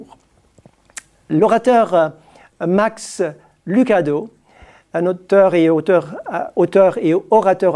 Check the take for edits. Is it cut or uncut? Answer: uncut